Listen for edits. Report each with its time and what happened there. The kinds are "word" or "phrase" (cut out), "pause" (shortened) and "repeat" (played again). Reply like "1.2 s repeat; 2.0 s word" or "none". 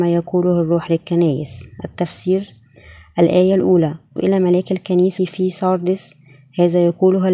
4.2 s word; 5.2 s word